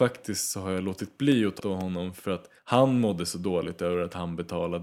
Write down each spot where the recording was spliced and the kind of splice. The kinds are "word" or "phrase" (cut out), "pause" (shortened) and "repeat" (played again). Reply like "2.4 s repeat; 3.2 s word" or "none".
1.6 s word; 2.6 s pause